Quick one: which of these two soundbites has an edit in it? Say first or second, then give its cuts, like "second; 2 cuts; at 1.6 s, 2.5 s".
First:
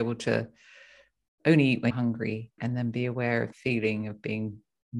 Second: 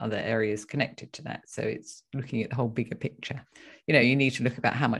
first; 3 cuts; at 1.9 s, 2.6 s, 3.5 s